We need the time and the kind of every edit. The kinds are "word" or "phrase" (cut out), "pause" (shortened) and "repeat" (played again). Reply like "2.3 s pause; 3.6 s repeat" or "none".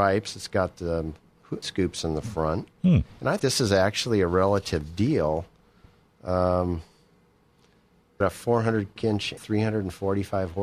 1.6 s word; 3.4 s word; 8.2 s word; 9.0 s word; 9.4 s word